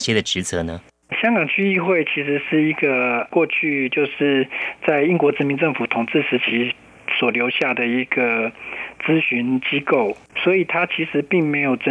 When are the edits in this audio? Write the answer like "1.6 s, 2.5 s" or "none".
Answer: 10.3 s

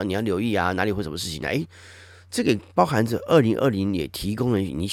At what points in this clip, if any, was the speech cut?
none

